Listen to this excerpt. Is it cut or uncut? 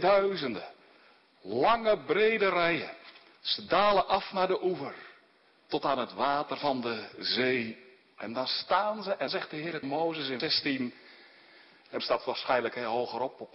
cut